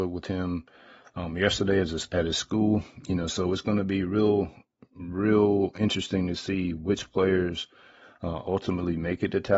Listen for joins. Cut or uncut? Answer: uncut